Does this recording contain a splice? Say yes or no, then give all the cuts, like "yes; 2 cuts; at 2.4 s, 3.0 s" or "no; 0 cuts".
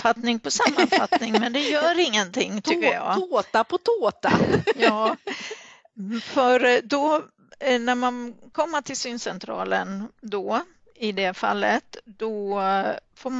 no; 0 cuts